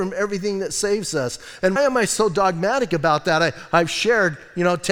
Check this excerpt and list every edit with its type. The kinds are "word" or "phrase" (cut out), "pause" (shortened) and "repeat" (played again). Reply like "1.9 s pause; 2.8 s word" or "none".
1.8 s word